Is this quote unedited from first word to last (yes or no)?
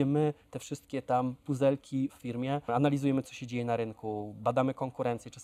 no